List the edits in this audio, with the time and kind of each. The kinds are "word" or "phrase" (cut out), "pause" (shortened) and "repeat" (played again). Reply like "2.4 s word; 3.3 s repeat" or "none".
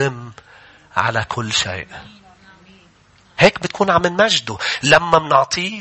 none